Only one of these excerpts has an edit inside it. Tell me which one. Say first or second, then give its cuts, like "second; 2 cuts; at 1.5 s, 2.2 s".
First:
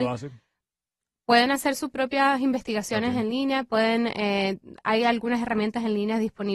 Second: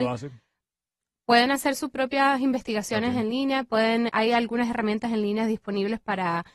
second; 1 cut; at 4.1 s